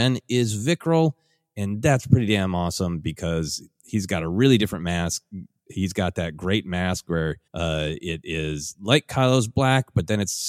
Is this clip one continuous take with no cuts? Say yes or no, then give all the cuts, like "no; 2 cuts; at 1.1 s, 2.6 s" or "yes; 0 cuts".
no; 1 cut; at 7.5 s